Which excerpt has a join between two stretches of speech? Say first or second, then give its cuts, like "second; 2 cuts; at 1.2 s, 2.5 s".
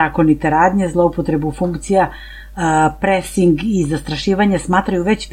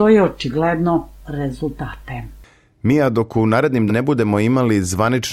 second; 2 cuts; at 1.2 s, 3.9 s